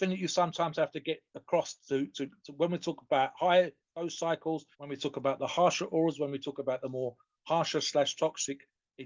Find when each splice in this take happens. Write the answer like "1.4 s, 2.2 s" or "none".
4.7 s